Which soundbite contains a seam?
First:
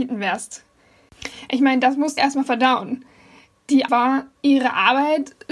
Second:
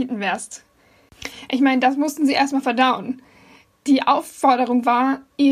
first; 2 cuts; at 2.2 s, 3.9 s

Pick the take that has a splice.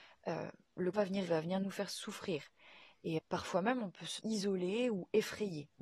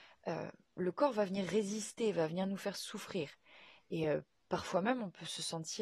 first; 4 cuts; at 0.9 s, 1.3 s, 3.2 s, 4.2 s

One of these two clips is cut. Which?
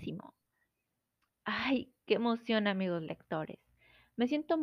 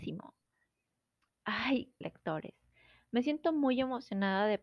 second; 1 cut; at 2.0 s

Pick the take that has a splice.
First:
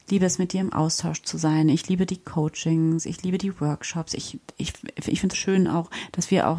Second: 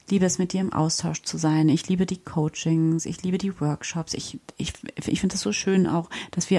first; 1 cut; at 5.3 s

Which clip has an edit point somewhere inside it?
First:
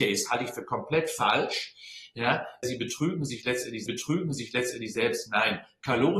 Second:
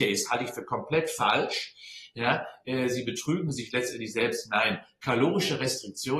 first; 2 cuts; at 2.6 s, 3.9 s

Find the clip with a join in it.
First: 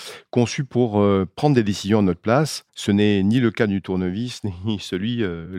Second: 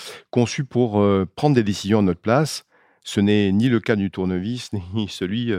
first; 1 cut; at 2.7 s

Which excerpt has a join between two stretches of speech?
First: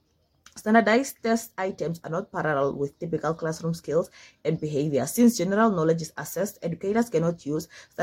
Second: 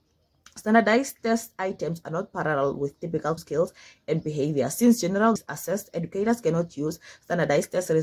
second; 2 cuts; at 3.4 s, 5.4 s

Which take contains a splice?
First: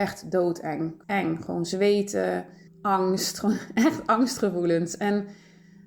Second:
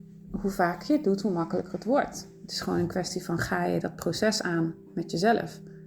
first; 2 cuts; at 1.0 s, 2.7 s

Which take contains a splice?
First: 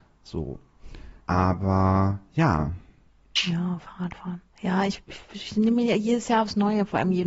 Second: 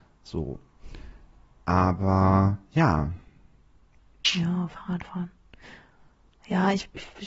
first; 3 cuts; at 1.2 s, 3.1 s, 4.5 s

